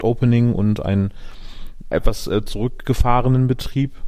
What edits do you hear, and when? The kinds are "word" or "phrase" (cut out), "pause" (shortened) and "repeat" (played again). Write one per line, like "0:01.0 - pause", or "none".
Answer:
0:01.9 - word